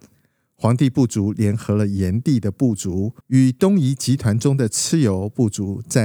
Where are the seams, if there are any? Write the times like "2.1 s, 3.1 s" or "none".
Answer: 3.2 s